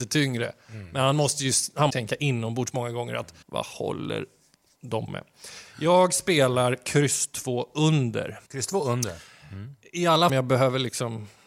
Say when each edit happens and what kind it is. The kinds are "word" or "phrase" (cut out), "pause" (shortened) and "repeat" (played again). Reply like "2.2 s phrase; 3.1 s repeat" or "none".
1.9 s phrase; 3.4 s pause; 5.1 s word; 8.5 s pause; 10.3 s phrase